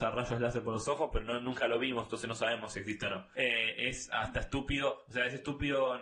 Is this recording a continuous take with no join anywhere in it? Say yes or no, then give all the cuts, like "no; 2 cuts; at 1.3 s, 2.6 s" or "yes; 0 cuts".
yes; 0 cuts